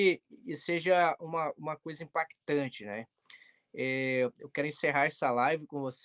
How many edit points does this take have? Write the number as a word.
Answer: zero